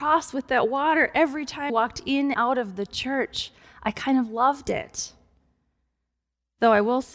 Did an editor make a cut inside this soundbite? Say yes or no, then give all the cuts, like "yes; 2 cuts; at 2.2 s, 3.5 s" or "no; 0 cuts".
yes; 2 cuts; at 1.7 s, 2.3 s